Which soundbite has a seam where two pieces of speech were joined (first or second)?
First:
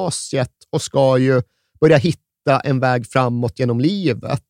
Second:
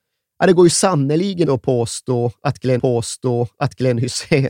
second